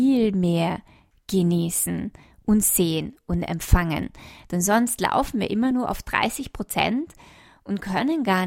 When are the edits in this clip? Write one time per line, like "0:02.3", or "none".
none